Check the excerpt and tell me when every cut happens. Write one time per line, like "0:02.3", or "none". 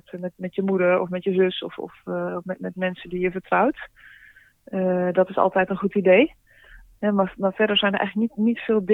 none